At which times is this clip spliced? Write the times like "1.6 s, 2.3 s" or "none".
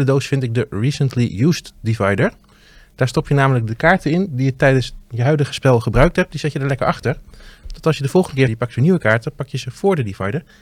8.5 s